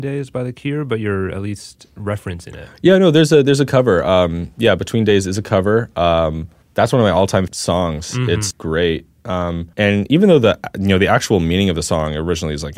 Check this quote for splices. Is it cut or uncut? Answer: cut